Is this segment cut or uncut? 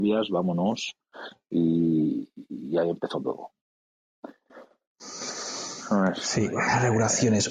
uncut